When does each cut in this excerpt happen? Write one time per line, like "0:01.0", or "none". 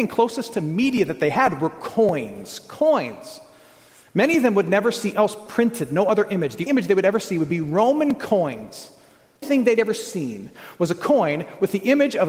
0:05.1
0:06.7
0:09.4

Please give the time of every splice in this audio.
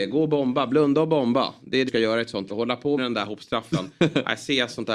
0:01.9
0:02.5
0:03.0

